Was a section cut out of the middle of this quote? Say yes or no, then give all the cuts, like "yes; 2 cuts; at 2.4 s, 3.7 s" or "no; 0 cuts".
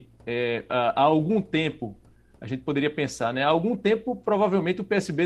no; 0 cuts